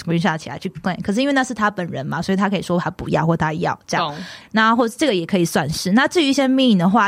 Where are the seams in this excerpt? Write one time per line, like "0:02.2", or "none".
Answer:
0:04.4